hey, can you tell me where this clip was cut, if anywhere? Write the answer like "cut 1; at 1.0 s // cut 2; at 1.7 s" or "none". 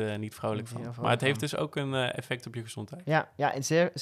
none